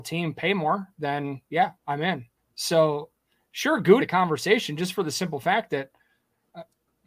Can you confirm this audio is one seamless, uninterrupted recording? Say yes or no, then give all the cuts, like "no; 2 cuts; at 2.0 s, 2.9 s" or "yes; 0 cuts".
no; 3 cuts; at 1.8 s, 2.4 s, 4.0 s